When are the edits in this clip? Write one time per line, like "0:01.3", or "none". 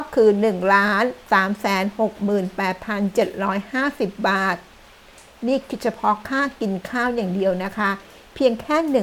none